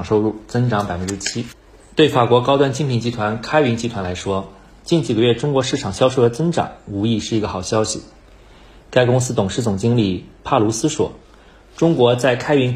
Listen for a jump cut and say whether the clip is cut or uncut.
uncut